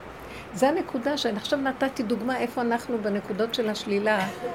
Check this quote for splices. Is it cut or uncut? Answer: uncut